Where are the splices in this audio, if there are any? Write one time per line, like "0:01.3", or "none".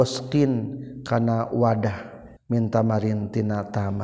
0:02.4